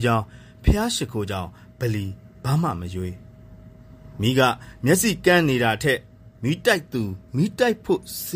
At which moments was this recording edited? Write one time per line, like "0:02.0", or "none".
0:06.4
0:07.3